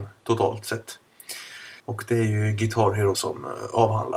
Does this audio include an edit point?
yes; 2 cuts; at 1.8 s, 3.1 s

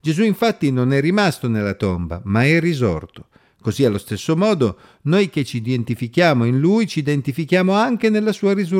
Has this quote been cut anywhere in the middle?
no; 0 cuts

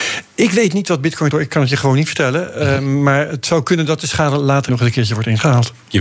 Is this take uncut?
no; 2 cuts; at 1.3 s, 4.7 s

